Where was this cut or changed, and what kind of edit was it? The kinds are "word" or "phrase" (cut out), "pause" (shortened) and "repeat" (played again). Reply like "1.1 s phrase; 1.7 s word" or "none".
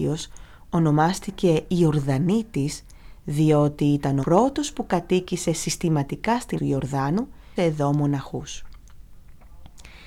4.2 s word; 6.6 s word; 7.6 s phrase